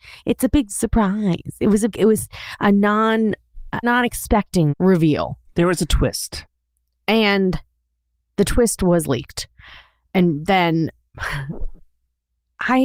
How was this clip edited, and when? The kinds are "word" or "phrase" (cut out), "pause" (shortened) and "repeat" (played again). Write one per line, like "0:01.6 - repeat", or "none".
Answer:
0:01.9 - word
0:03.8 - phrase
0:04.7 - word